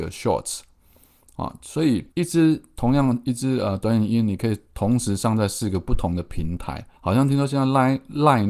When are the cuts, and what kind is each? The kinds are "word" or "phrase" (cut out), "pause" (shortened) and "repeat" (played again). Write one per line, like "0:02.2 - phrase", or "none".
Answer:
0:02.1 - pause
0:07.0 - pause